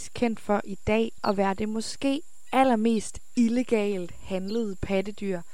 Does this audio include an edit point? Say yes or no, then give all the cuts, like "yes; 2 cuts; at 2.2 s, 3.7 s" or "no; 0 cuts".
yes; 1 cut; at 1.2 s